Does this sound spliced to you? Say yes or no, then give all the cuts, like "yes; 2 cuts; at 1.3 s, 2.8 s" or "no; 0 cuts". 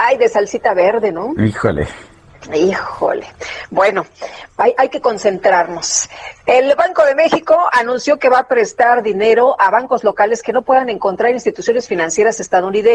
no; 0 cuts